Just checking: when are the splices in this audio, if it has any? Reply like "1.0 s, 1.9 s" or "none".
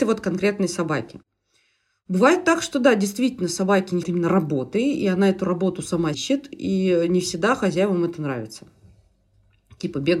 4.0 s, 6.1 s

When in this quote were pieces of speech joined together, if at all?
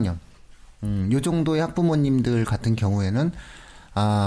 none

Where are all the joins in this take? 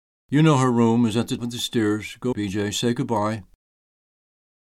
1.4 s, 2.3 s

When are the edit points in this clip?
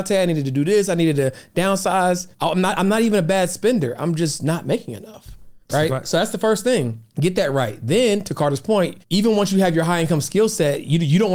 2.3 s, 5.6 s, 7.1 s, 9.0 s

